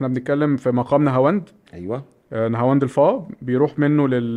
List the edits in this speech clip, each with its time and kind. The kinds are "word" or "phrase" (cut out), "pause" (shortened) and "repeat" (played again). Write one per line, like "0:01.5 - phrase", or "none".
none